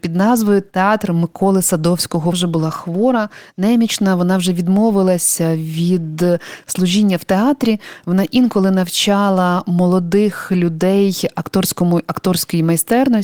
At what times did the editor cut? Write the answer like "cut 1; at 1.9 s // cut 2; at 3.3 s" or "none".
cut 1; at 2.3 s